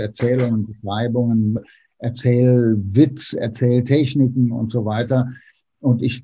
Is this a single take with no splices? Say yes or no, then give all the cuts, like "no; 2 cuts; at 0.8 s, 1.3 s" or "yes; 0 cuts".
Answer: no; 1 cut; at 1.6 s